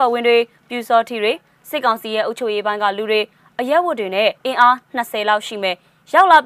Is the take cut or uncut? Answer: cut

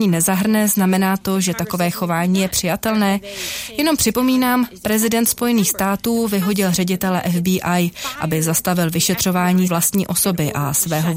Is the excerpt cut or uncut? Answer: cut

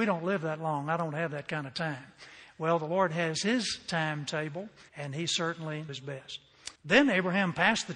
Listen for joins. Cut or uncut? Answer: cut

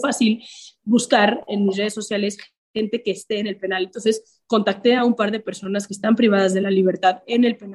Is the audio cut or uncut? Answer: uncut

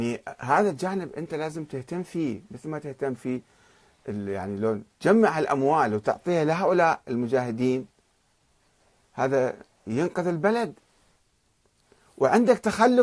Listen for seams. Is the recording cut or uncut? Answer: uncut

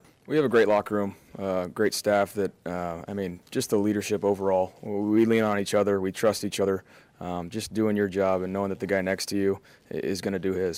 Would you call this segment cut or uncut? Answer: uncut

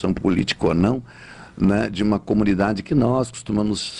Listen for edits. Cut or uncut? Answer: uncut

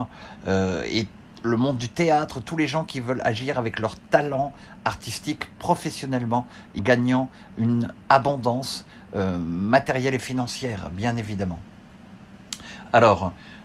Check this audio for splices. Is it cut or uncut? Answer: cut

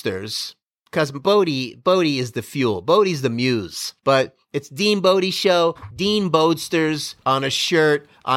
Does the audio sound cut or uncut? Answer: cut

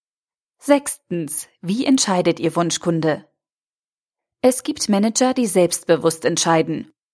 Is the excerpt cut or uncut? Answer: uncut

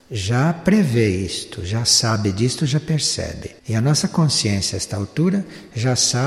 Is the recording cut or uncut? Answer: cut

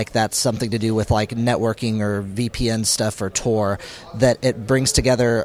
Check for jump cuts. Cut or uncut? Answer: uncut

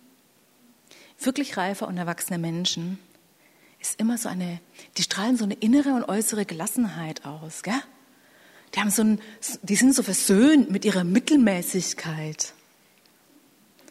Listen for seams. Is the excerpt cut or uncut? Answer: uncut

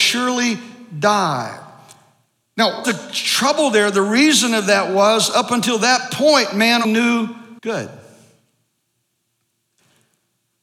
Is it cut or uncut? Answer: cut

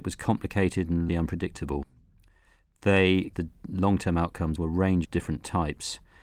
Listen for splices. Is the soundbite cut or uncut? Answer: cut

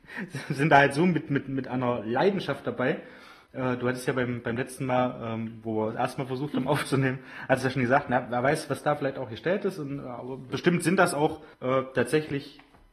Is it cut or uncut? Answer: cut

